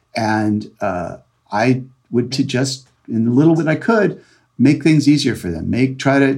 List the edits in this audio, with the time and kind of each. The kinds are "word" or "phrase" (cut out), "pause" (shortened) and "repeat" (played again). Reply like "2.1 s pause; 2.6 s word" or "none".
2.3 s word; 3.6 s word; 4.5 s word